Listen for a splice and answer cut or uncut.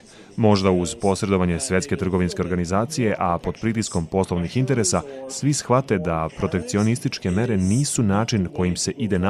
uncut